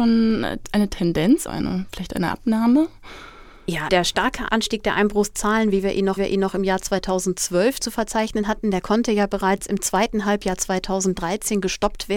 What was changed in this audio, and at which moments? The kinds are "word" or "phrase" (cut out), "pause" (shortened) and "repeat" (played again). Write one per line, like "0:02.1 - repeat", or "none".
0:01.5 - word
0:03.9 - word
0:06.2 - repeat

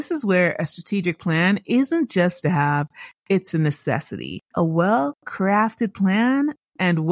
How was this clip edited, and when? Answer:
0:02.4 - word
0:04.5 - pause

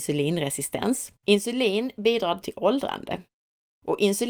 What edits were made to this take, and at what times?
0:01.2 - pause
0:02.4 - word

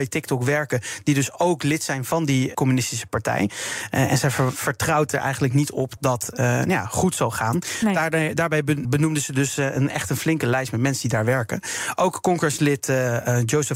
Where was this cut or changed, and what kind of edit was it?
0:02.5 - phrase
0:06.0 - word
0:08.8 - word

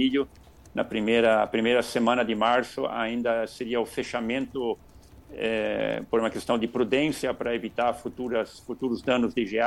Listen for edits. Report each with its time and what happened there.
none

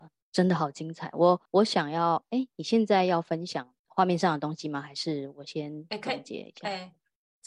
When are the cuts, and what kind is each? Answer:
0:01.5 - pause
0:03.8 - pause

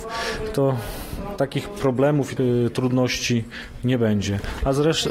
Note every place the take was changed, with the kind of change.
0:02.4 - word

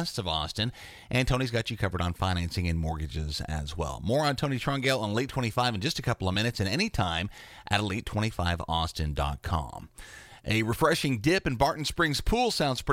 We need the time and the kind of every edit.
none

